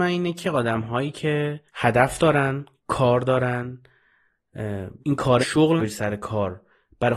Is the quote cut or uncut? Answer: cut